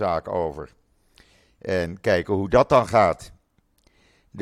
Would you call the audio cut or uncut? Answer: uncut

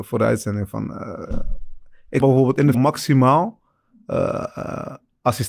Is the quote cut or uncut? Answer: cut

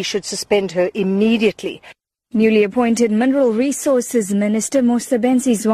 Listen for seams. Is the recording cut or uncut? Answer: uncut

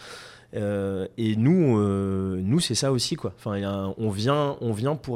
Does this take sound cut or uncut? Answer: uncut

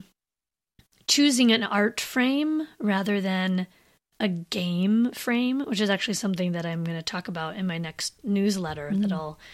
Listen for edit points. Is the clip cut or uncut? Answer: uncut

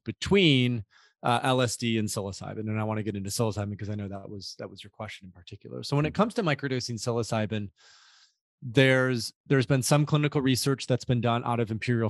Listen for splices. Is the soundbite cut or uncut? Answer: uncut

